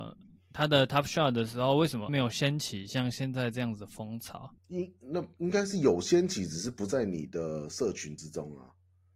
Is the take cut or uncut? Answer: cut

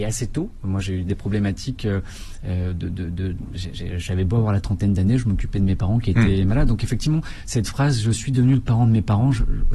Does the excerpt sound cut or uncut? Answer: uncut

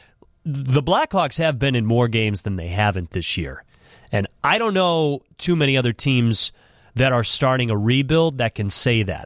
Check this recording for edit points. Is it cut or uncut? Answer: uncut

